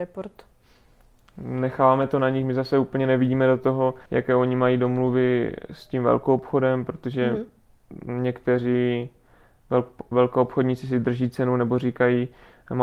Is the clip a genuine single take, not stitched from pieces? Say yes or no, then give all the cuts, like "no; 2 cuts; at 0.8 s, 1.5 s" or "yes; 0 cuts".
no; 1 cut; at 4.1 s